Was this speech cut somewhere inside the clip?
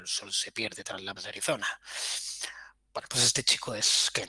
yes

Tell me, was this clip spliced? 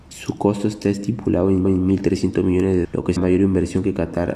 yes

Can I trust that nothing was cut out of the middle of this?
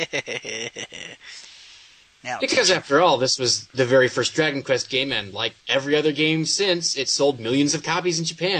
no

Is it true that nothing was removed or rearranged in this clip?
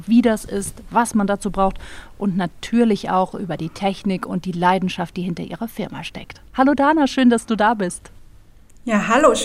yes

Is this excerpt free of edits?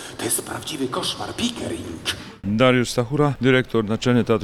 yes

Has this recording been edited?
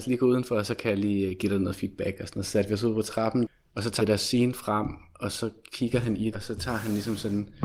yes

